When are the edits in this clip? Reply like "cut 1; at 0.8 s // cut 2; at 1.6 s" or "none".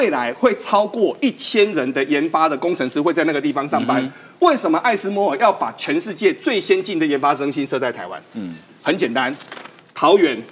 none